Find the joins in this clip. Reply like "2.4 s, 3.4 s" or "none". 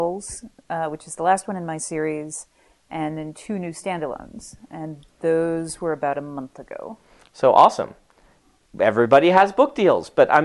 none

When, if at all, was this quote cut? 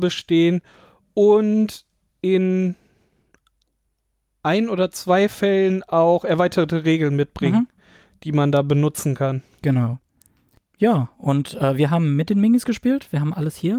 none

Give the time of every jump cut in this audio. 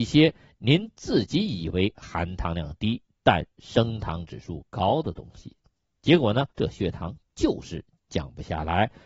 6.5 s

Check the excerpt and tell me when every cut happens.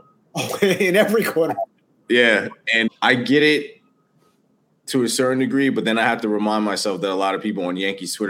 2.9 s

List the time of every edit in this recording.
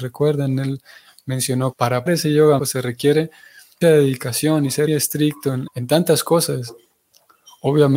1.7 s, 2.1 s, 2.6 s, 3.8 s, 4.9 s, 5.7 s

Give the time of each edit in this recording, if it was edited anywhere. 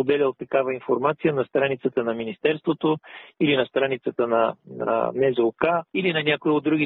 5.9 s

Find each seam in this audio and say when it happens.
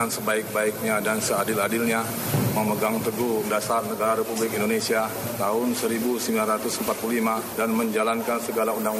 3.4 s

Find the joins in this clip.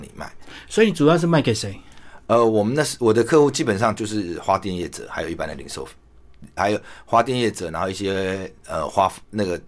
6.6 s

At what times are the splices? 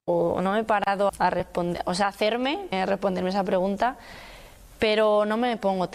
1.1 s, 2.7 s

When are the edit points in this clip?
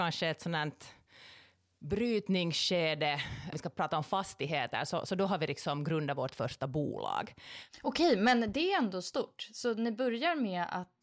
3.5 s

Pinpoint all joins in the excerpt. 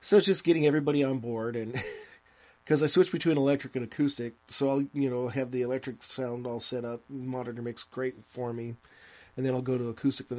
4.4 s

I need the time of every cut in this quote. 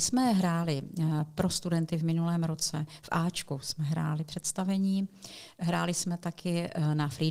none

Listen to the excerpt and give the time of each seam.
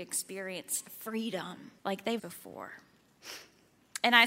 1.8 s, 2.2 s

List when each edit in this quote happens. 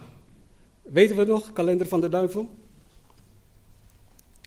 none

